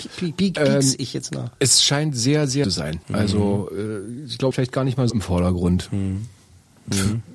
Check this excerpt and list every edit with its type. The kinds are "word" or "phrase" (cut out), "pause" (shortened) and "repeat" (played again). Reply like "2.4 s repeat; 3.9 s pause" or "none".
2.6 s phrase; 3.0 s pause; 4.5 s phrase; 5.1 s word